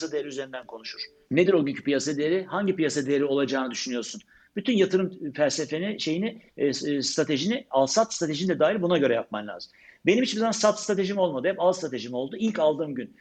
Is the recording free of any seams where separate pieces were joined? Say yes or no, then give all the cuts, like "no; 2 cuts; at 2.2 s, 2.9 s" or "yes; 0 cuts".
yes; 0 cuts